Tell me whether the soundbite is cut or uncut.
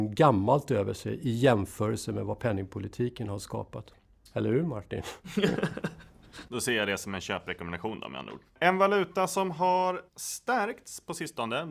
cut